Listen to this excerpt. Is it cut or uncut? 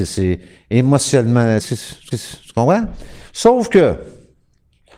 cut